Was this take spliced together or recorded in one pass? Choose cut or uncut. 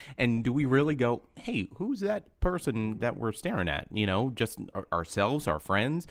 cut